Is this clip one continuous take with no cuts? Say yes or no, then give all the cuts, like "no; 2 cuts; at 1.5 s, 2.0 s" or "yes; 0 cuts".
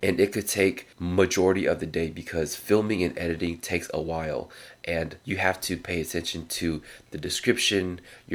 no; 2 cuts; at 0.9 s, 5.2 s